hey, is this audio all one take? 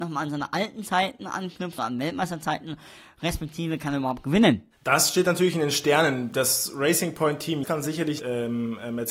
no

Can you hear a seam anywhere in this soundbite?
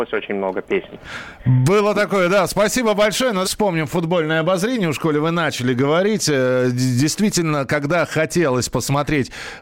yes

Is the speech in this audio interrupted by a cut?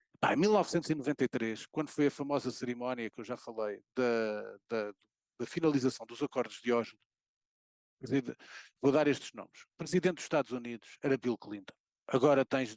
no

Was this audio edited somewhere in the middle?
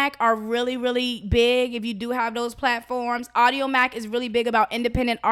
no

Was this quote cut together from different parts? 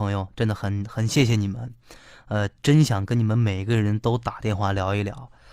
no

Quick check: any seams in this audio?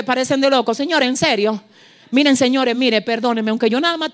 no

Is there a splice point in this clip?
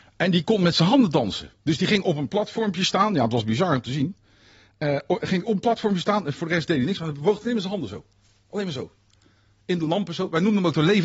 yes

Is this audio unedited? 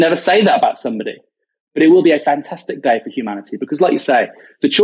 yes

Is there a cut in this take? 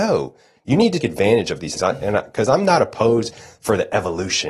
yes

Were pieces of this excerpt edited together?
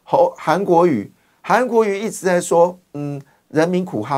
no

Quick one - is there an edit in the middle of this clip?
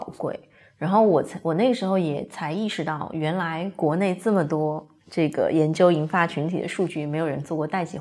no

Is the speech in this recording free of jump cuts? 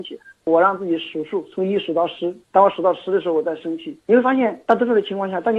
no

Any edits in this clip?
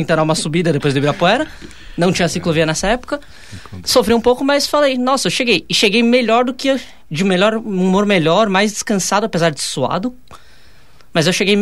no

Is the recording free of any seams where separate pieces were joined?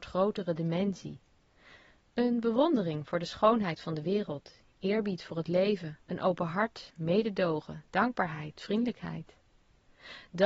no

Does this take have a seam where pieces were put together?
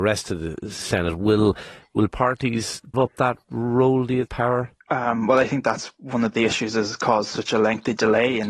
yes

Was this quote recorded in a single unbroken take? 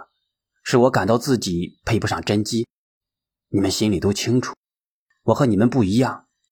yes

